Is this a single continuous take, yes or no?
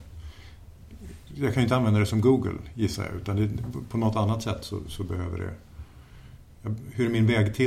yes